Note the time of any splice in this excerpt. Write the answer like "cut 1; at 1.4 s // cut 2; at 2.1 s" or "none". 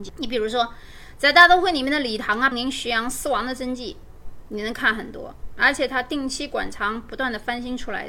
cut 1; at 2.5 s